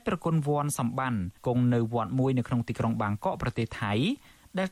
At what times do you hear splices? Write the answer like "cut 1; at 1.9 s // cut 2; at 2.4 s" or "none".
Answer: cut 1; at 1.4 s